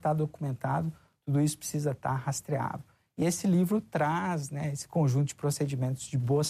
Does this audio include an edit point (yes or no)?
no